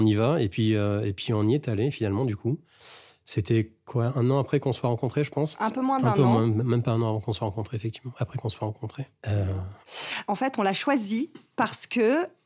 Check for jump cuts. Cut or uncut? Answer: uncut